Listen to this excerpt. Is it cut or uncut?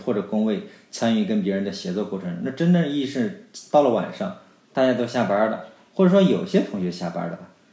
uncut